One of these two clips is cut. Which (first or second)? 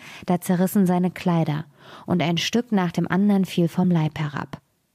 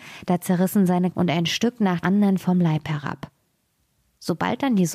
second